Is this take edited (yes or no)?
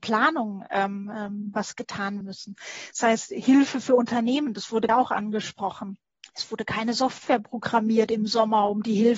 yes